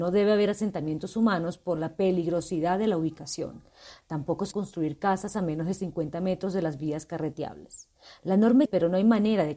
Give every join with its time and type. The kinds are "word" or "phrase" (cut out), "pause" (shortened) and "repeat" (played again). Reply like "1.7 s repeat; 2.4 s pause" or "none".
4.5 s word; 8.7 s word

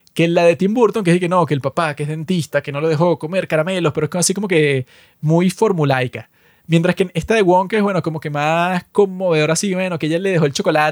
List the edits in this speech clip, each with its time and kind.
none

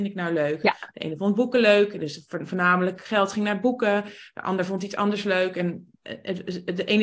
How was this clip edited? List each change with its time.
none

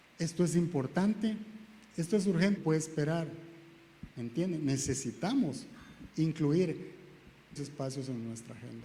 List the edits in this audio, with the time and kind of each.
2.6 s word; 4.1 s pause; 7.6 s word

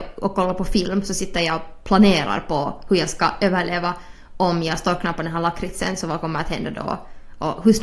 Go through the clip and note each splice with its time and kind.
none

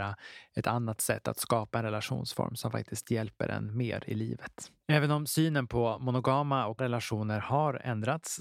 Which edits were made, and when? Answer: 4.8 s pause; 6.8 s word

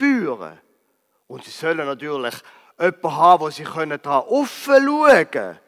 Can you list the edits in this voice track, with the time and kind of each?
none

